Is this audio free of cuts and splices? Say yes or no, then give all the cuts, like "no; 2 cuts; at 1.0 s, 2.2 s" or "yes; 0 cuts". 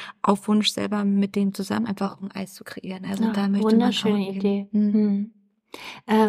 yes; 0 cuts